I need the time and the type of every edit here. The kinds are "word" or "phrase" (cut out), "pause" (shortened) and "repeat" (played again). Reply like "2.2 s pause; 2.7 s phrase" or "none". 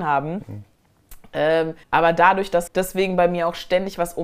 1.8 s pause; 2.7 s word

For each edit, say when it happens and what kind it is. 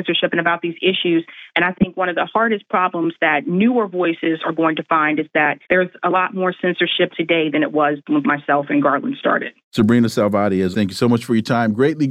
5.6 s pause; 7.1 s word; 8.2 s phrase; 9.6 s pause; 10.7 s word

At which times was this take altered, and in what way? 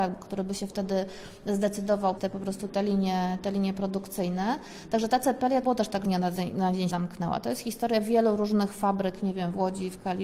2.2 s word; 5.6 s word; 6.0 s phrase; 6.9 s word

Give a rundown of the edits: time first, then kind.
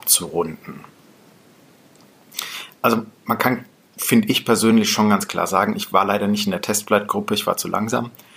none

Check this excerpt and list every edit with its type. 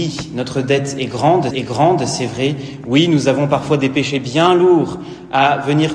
1.5 s repeat

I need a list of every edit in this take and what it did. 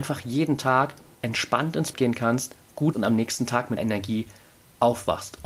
1.1 s word; 1.9 s word; 2.9 s word; 3.8 s word

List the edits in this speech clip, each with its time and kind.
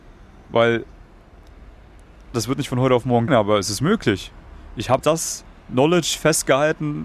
2.3 s word; 3.3 s word; 5.0 s word; 5.6 s pause

